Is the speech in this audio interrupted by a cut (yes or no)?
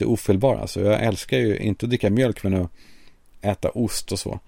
no